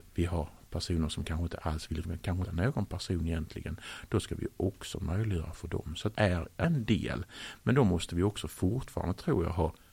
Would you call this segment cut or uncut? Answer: cut